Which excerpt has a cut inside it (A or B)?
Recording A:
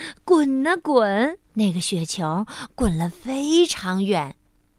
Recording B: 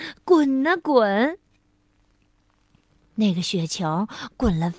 A